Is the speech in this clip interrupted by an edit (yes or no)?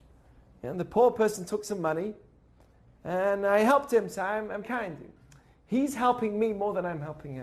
yes